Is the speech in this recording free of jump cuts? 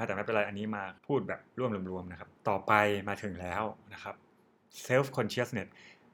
no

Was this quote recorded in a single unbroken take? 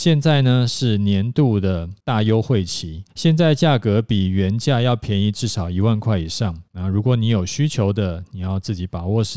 no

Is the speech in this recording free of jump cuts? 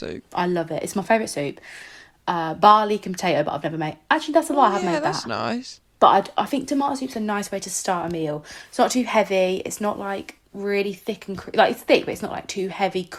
yes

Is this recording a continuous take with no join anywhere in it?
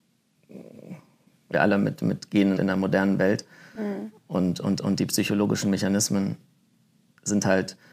no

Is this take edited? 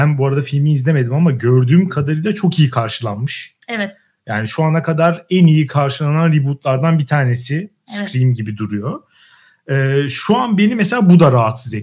no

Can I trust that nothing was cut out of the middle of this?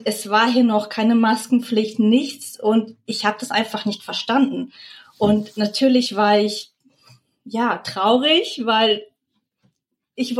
yes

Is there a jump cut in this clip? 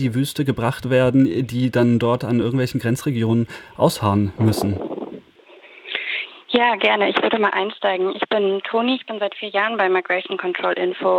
no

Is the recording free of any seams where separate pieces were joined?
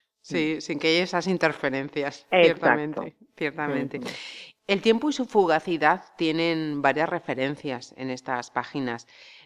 yes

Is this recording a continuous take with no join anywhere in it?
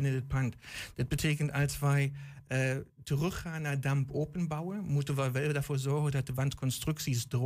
yes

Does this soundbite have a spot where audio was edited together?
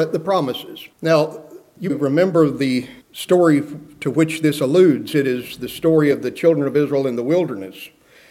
yes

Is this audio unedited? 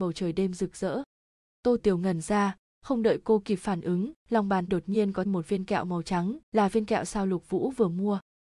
no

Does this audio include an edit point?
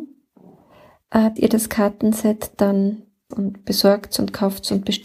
yes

